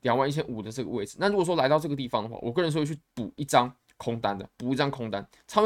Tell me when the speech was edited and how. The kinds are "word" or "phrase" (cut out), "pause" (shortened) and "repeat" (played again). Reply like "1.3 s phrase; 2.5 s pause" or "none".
4.5 s pause